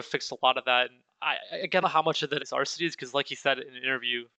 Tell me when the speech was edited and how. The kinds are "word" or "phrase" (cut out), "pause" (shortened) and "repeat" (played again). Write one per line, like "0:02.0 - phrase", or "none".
0:01.1 - pause
0:01.8 - phrase
0:02.4 - word